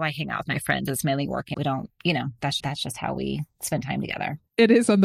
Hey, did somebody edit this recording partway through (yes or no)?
yes